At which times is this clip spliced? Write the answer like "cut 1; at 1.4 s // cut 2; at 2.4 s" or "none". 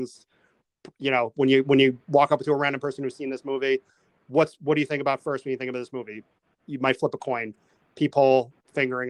cut 1; at 0.9 s